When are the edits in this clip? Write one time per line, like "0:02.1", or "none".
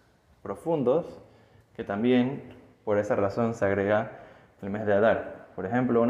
none

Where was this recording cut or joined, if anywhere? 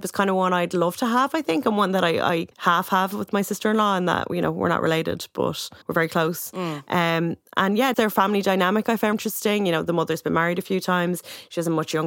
0:02.5
0:05.8
0:07.9
0:09.1

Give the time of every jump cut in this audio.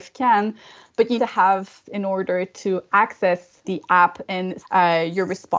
0:01.2
0:01.8
0:03.6
0:04.6

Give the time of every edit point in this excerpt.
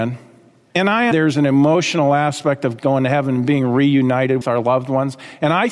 0:01.1
0:04.4

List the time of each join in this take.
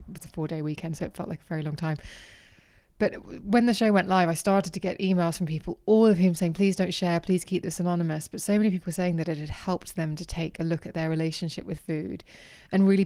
none

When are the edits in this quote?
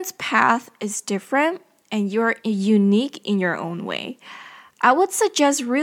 none

